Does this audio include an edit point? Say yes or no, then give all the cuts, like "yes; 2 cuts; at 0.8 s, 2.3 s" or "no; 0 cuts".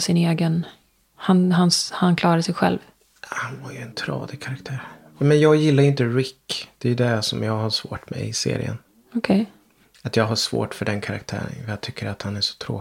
no; 0 cuts